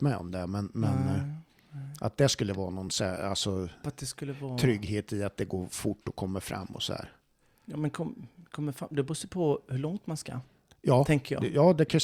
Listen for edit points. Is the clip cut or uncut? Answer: uncut